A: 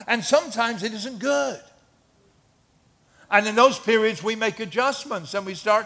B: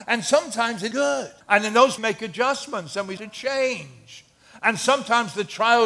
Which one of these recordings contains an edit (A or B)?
B